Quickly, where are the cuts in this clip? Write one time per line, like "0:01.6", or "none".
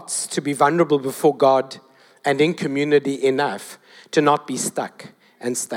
none